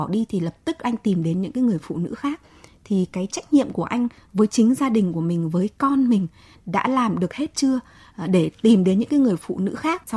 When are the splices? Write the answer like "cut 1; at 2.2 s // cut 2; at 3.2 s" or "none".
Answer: none

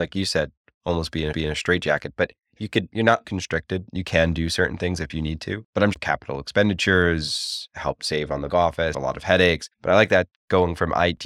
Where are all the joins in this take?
cut 1; at 1.3 s // cut 2; at 3.2 s // cut 3; at 5.9 s // cut 4; at 8.5 s // cut 5; at 8.9 s // cut 6; at 9.7 s

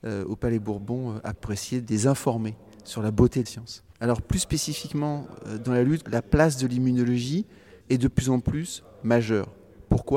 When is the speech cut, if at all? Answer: cut 1; at 1.4 s // cut 2; at 3.5 s // cut 3; at 3.9 s // cut 4; at 6.0 s // cut 5; at 7.8 s

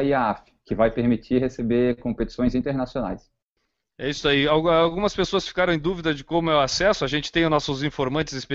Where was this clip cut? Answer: none

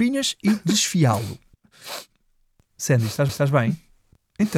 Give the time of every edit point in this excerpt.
cut 1; at 3.3 s

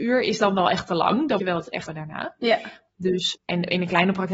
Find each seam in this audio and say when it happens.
cut 1; at 1.4 s // cut 2; at 1.9 s // cut 3; at 3.3 s

